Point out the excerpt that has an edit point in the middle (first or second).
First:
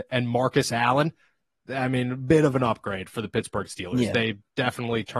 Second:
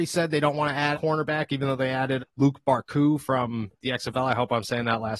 second